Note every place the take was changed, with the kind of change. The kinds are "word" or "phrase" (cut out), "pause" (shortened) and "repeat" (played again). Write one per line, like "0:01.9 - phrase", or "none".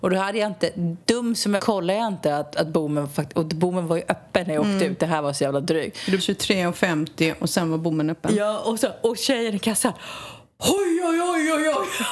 0:01.0 - pause
0:01.6 - phrase
0:06.2 - word